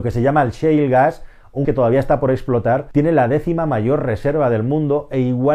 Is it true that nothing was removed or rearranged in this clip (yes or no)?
no